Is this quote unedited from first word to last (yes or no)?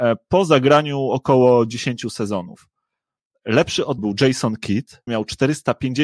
no